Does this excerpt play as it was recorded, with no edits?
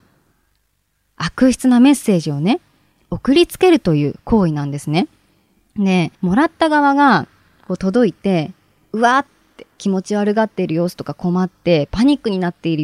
no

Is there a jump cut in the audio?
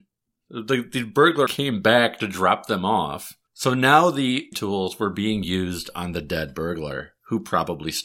yes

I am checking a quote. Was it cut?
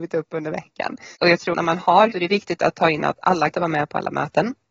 yes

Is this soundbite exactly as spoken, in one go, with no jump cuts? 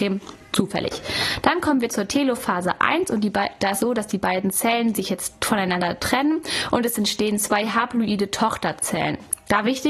no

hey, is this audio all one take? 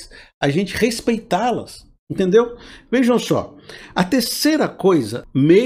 yes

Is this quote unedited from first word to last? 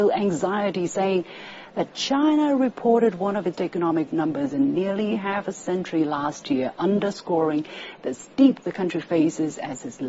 no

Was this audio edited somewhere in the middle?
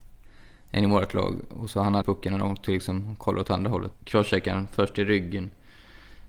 yes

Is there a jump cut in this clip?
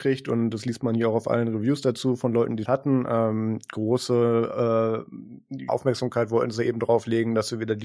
yes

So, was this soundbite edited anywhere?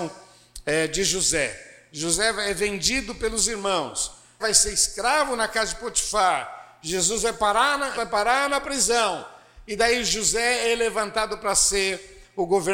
yes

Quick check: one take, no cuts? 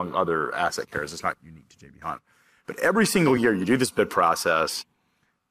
yes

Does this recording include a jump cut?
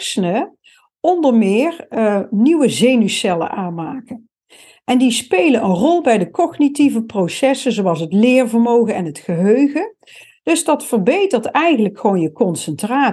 no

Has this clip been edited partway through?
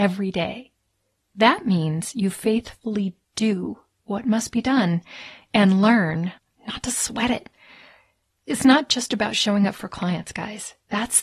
no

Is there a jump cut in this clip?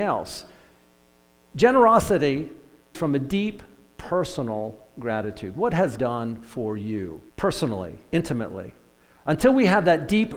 yes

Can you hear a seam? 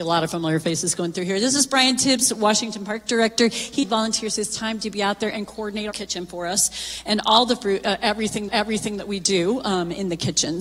yes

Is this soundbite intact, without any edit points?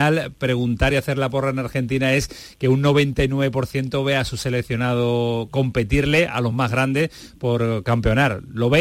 yes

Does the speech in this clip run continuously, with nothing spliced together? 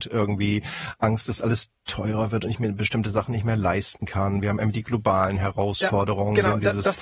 yes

